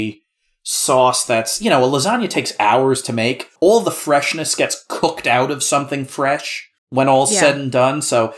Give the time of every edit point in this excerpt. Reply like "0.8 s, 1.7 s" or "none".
3.6 s, 6.8 s